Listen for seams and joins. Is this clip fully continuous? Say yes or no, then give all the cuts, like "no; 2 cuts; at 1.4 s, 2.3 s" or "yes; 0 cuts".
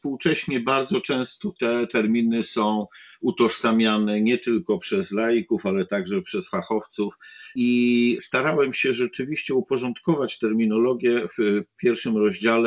yes; 0 cuts